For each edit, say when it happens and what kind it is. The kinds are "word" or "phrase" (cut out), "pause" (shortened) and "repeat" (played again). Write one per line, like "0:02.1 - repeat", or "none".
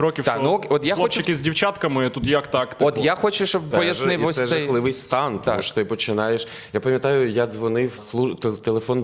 0:03.7 - word
0:08.0 - word

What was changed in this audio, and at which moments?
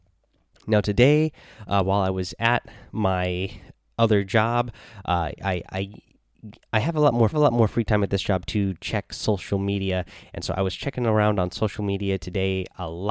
0:07.3 - repeat

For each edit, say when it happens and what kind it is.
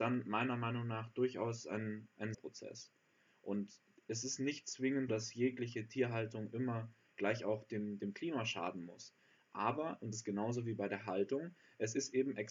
0:02.3 - word
0:05.1 - word
0:10.1 - word

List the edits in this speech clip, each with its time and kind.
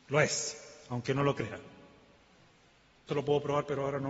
0:03.1 - word

